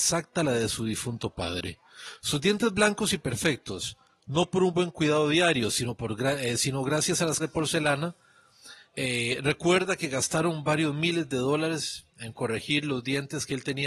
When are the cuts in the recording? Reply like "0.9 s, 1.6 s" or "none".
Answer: 7.4 s, 8.8 s, 12.1 s